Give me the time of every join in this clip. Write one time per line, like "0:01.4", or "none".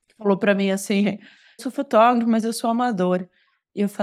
0:01.6